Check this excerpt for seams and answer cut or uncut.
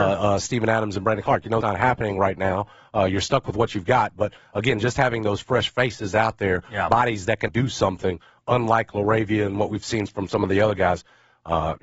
cut